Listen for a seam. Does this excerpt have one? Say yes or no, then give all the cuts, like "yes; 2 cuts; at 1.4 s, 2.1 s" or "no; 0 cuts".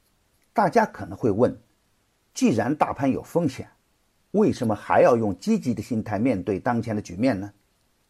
no; 0 cuts